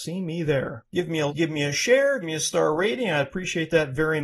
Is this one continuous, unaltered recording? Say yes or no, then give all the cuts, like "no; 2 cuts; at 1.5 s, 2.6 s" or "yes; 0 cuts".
no; 2 cuts; at 1.3 s, 2.2 s